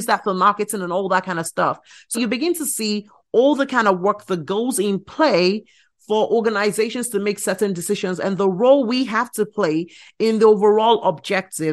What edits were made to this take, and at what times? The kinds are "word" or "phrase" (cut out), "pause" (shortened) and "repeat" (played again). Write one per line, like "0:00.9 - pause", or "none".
0:02.1 - word

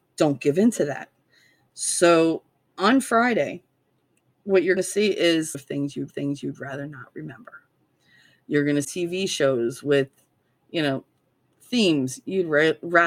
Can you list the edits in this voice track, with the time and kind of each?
0:04.8 - word
0:05.5 - phrase
0:06.1 - repeat
0:08.8 - word

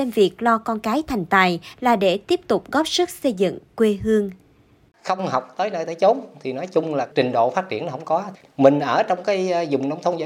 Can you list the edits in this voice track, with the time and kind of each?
none

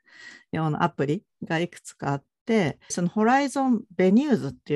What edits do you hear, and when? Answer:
0:02.9 - word

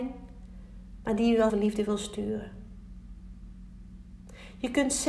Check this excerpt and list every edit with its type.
0:01.5 - word

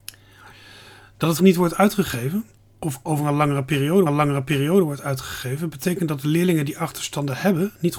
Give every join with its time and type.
0:01.4 - word
0:02.6 - pause
0:04.1 - repeat

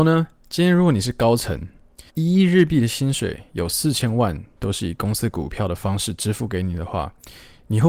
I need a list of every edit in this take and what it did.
0:02.1 - pause

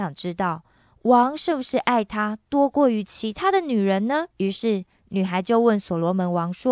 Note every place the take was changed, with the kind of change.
0:04.3 - pause

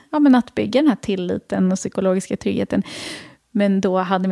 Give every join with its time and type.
none

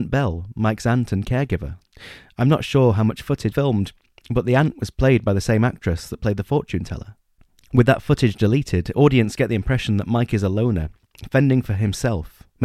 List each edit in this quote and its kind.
0:03.5 - word

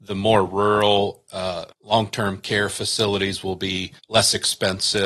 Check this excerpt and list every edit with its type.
0:01.7 - pause
0:04.0 - pause

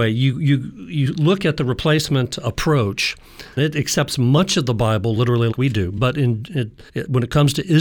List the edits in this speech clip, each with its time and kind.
0:03.6 - word
0:05.5 - word
0:06.9 - pause

